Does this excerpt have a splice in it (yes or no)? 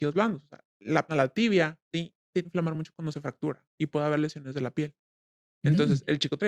yes